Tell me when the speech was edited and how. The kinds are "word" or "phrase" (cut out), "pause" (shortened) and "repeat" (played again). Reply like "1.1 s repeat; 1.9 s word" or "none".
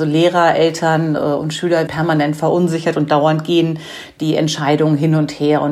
1.9 s word